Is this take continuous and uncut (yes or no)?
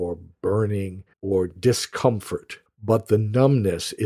no